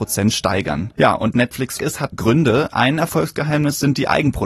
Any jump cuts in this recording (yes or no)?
yes